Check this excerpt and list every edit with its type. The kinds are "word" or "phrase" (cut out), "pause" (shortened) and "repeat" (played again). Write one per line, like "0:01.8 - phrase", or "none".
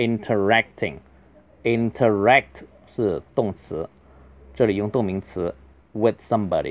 0:05.8 - word